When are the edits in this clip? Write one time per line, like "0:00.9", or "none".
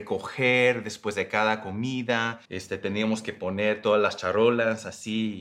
0:02.4